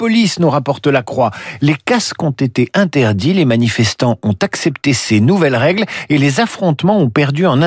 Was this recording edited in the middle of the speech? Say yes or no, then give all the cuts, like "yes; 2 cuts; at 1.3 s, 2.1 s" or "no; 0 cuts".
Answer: no; 0 cuts